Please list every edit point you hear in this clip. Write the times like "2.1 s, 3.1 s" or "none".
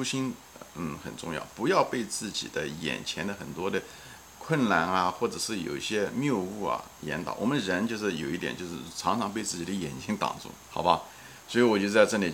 4.3 s, 10.7 s